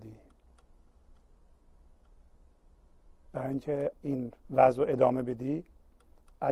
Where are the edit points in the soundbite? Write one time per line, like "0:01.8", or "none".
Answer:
0:03.9
0:04.4